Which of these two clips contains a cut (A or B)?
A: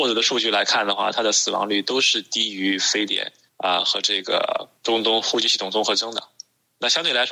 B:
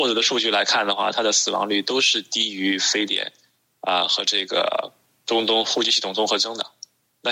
A